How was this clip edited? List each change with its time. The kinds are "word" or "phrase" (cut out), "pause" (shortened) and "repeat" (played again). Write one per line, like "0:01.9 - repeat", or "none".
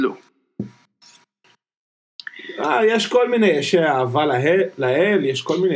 none